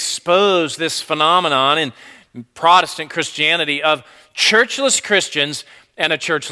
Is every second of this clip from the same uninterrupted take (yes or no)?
yes